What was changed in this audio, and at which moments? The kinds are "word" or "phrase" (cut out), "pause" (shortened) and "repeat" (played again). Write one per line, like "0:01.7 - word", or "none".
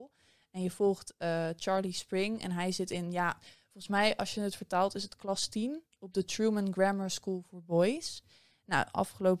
none